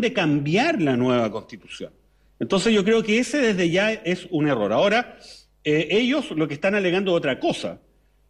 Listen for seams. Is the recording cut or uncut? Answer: uncut